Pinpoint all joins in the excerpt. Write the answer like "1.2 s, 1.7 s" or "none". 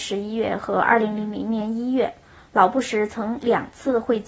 none